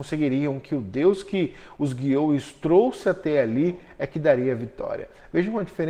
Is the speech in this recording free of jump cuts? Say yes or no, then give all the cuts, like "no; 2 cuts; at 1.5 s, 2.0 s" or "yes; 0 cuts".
yes; 0 cuts